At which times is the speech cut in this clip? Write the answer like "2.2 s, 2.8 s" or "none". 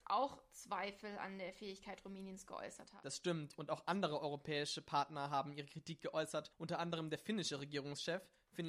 6.5 s